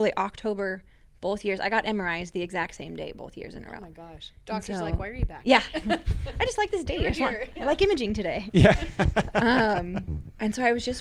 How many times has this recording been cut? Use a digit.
0